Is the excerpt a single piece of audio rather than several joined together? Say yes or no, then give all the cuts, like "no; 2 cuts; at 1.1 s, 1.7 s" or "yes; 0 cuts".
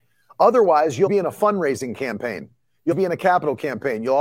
no; 2 cuts; at 1.1 s, 2.9 s